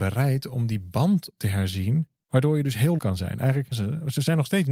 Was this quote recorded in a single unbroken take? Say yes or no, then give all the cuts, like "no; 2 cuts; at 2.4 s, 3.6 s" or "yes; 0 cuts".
no; 2 cuts; at 3.0 s, 3.7 s